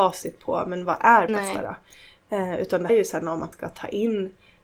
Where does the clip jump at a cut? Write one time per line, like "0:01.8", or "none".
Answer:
0:01.3
0:02.9
0:03.5